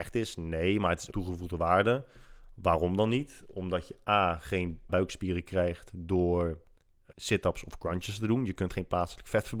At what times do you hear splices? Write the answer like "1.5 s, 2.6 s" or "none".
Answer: 1.1 s, 4.9 s, 7.1 s